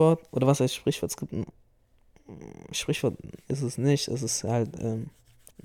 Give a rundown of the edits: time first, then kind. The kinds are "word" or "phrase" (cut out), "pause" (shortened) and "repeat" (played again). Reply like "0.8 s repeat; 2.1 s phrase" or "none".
none